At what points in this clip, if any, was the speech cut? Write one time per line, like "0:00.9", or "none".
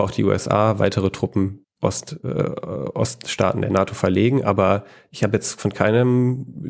0:01.6

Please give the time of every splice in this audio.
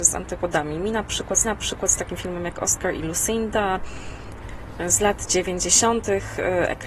0:01.4

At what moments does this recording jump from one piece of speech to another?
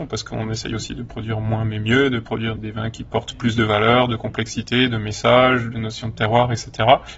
0:02.6

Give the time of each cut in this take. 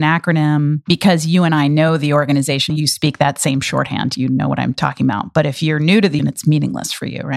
0:02.7
0:06.2

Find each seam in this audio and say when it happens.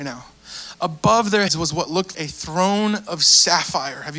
0:01.5
0:02.1

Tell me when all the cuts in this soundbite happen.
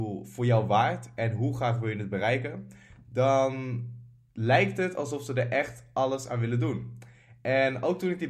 none

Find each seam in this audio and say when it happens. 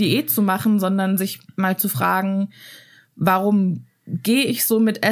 none

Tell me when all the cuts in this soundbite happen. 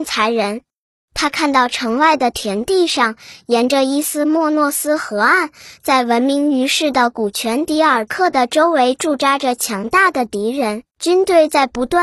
0:10.9

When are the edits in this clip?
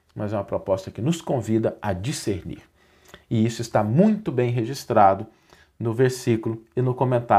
none

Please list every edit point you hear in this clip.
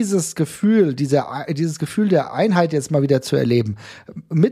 none

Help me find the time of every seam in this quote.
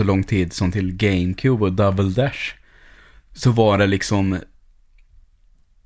none

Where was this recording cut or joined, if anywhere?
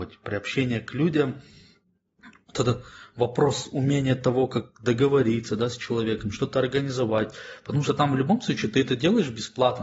none

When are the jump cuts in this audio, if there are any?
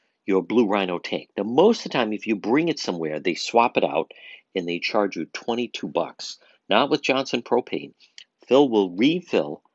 none

